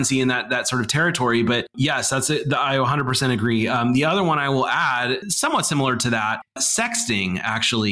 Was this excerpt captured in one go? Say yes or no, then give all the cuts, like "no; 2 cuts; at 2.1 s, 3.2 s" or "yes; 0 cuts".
yes; 0 cuts